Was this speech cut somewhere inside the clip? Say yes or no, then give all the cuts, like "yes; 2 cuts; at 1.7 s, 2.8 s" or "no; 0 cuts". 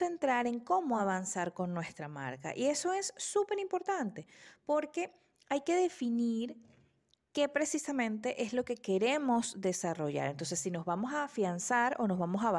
no; 0 cuts